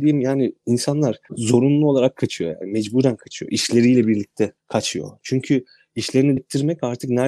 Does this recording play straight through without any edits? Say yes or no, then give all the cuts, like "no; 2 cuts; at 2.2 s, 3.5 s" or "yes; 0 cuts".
no; 2 cuts; at 4.6 s, 6.4 s